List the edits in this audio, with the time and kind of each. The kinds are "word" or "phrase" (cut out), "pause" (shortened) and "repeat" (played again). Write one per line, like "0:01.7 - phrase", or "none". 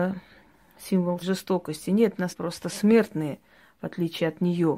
0:01.2 - phrase
0:02.3 - phrase